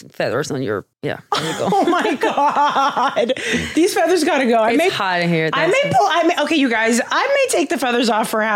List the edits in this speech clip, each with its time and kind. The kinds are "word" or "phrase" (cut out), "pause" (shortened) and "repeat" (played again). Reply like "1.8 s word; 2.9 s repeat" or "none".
0.9 s pause

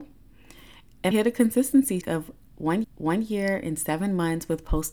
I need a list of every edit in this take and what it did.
1.1 s word; 2.0 s word; 2.8 s repeat

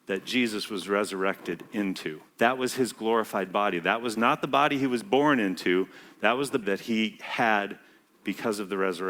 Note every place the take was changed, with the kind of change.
2.3 s pause; 6.6 s word

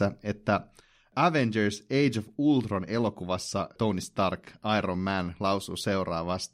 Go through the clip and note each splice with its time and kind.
none

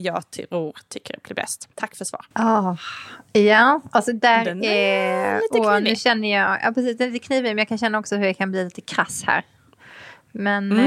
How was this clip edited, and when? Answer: 1.7 s pause; 2.3 s pause

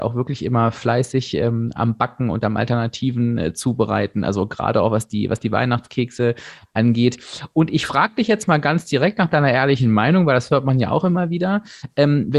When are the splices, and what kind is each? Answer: none

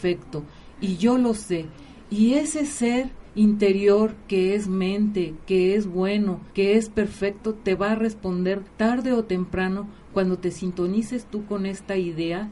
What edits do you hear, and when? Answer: 3.3 s pause; 6.5 s pause; 8.7 s pause

